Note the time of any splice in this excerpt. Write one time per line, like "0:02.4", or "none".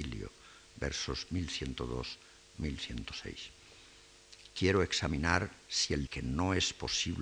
0:06.1

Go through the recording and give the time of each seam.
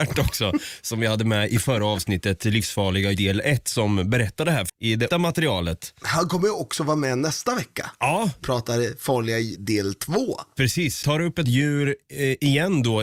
0:03.1
0:04.7
0:05.1
0:08.4
0:09.6
0:11.0
0:11.4

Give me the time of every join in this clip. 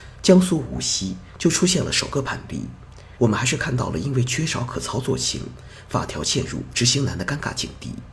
0:03.2

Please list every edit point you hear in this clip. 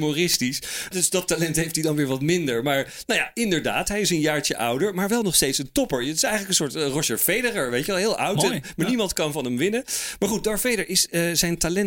0:00.9

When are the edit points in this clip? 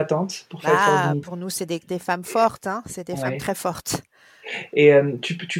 0:01.2
0:01.9

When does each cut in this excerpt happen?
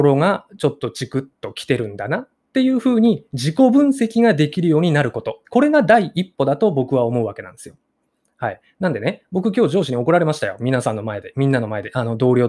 0:05.4

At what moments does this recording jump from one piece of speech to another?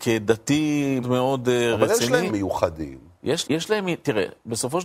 0:01.0
0:02.3
0:03.4

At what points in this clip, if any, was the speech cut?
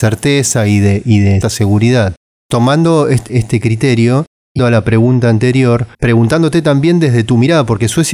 0:01.4
0:04.6
0:05.9

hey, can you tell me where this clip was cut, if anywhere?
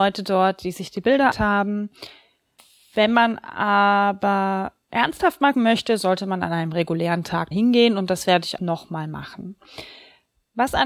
0:01.3
0:05.5
0:07.5
0:08.6

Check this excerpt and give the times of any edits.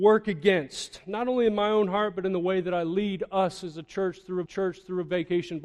0:04.5

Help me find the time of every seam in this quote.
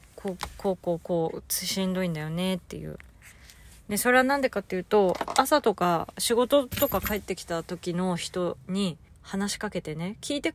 0:09.1

